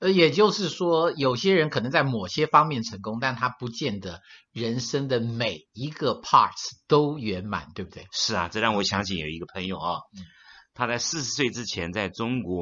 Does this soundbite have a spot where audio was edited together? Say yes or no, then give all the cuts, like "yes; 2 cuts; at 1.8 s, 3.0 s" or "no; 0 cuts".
no; 0 cuts